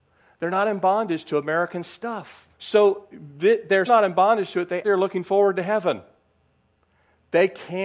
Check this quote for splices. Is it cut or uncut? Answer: cut